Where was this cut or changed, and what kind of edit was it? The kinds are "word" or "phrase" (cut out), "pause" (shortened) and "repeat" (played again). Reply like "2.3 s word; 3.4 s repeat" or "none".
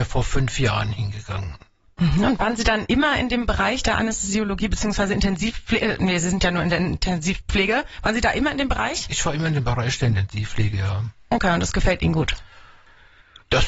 none

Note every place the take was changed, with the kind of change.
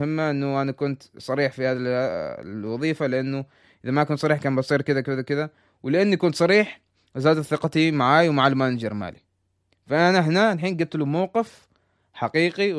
none

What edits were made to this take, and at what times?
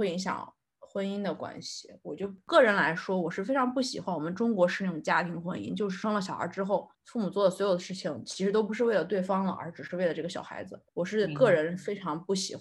6.9 s pause; 10.9 s pause

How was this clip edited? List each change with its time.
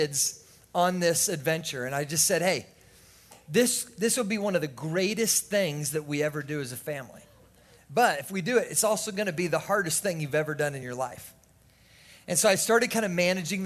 none

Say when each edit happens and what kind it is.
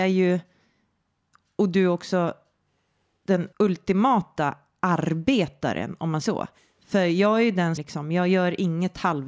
3.5 s pause; 6.2 s word; 6.6 s pause; 7.8 s word

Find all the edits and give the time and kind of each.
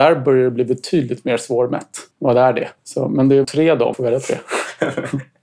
2.1 s pause; 2.8 s pause; 3.4 s phrase; 3.9 s phrase

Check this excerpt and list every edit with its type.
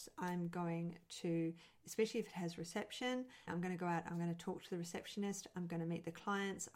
3.5 s word

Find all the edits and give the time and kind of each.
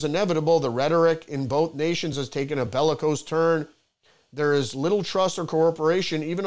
none

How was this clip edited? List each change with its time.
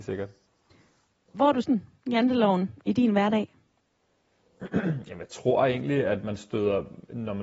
1.6 s phrase

